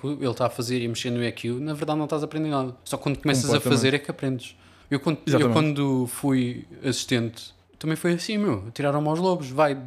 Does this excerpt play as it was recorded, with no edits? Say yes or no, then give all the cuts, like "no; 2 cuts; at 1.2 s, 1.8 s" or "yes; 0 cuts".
no; 3 cuts; at 2.8 s, 4.8 s, 7.6 s